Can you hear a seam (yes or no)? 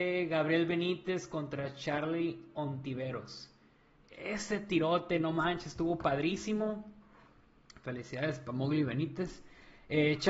no